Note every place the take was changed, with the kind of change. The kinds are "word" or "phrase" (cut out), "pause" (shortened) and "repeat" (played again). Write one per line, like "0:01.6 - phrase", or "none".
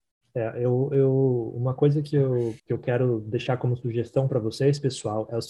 0:02.6 - pause